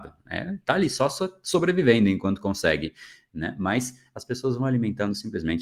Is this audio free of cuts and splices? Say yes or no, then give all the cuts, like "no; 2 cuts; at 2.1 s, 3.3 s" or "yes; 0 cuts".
yes; 0 cuts